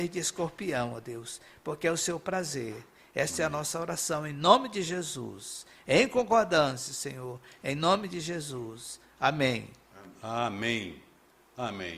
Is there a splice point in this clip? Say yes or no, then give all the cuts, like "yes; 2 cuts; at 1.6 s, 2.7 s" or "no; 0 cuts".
no; 0 cuts